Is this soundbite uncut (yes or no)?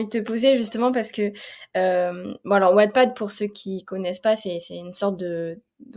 yes